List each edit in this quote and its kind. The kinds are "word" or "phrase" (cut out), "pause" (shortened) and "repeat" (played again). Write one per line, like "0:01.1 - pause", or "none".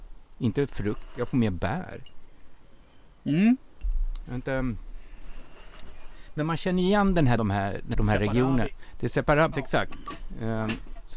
0:07.4 - phrase
0:07.9 - word
0:09.5 - word